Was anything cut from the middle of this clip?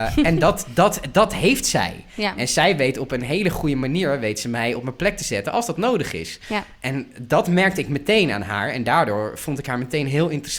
no; 0 cuts

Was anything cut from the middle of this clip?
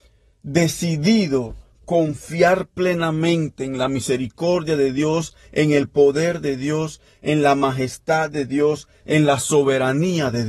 no; 0 cuts

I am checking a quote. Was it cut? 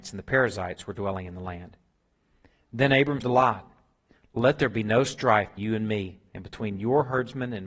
yes; 2 cuts; at 3.2 s, 5.6 s

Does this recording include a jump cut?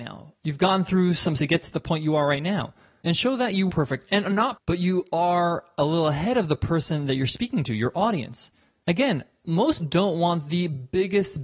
yes; 4 cuts; at 1.4 s, 3.7 s, 4.6 s, 9.8 s

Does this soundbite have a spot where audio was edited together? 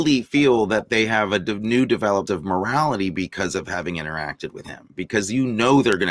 yes; 1 cut; at 2.3 s

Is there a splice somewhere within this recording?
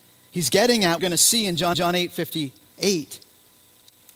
yes; 2 cuts; at 1.0 s, 1.7 s

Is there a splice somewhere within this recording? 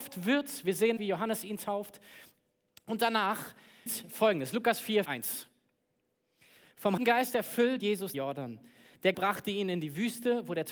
yes; 7 cuts; at 1.0 s, 3.9 s, 5.0 s, 7.0 s, 7.8 s, 8.1 s, 9.1 s

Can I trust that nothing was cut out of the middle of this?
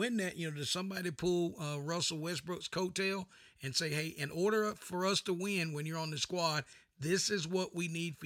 yes; 0 cuts

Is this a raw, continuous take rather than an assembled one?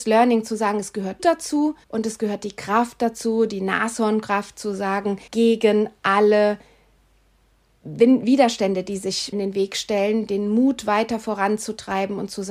no; 4 cuts; at 1.2 s, 1.8 s, 5.3 s, 9.3 s

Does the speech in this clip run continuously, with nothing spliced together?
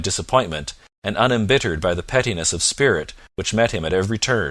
yes; 0 cuts

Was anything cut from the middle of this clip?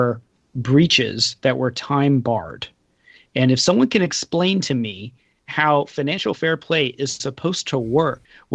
no; 0 cuts

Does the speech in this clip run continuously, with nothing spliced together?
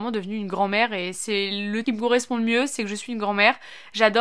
no; 2 cuts; at 1.1 s, 1.8 s

